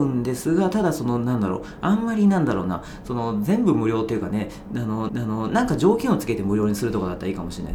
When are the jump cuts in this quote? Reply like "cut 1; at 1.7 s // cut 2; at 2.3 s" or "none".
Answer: cut 1; at 5.1 s